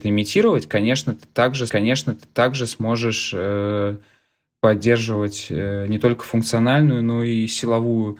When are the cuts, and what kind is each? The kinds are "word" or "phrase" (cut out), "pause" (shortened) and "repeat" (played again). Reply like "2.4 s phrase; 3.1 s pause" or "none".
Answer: 1.7 s repeat